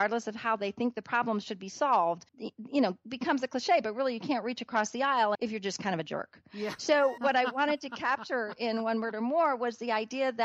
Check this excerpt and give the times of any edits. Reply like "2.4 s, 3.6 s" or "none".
2.3 s, 5.3 s, 7.2 s